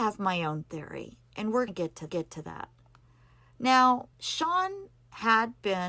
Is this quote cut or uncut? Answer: cut